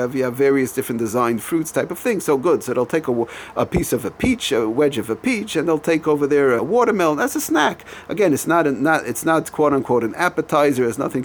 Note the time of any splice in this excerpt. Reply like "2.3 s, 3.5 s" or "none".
5.7 s, 6.6 s